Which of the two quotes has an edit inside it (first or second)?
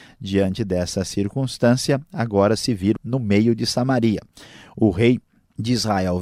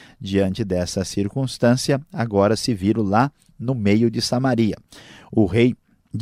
first